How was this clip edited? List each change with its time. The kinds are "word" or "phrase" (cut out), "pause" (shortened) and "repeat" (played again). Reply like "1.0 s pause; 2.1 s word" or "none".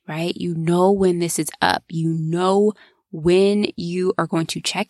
none